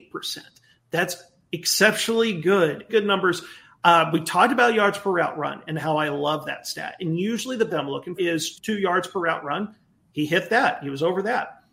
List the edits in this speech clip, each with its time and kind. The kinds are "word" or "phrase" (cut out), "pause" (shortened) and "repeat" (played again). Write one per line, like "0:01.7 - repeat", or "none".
0:02.9 - word
0:07.7 - word
0:08.2 - word
0:08.5 - word